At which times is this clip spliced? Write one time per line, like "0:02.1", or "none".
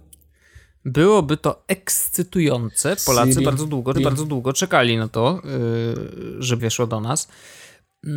0:03.0
0:03.9
0:06.6